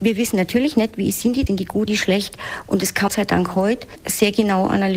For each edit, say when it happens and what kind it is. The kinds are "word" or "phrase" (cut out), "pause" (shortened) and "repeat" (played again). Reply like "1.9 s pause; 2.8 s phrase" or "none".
1.5 s word; 1.9 s word; 3.1 s phrase